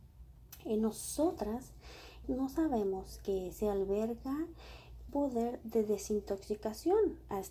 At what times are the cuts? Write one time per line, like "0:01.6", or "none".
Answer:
0:02.2
0:05.1